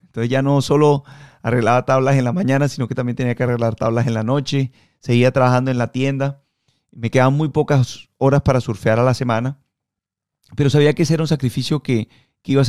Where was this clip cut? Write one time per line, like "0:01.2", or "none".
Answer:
none